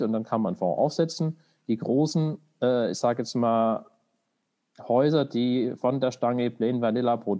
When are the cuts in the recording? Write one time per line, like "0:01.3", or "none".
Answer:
none